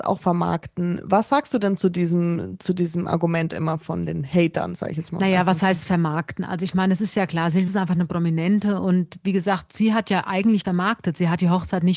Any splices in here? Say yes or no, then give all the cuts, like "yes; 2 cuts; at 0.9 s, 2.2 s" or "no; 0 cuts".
yes; 2 cuts; at 7.7 s, 10.6 s